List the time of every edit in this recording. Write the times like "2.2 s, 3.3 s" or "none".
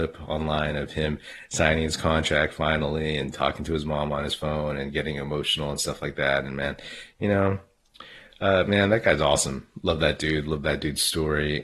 none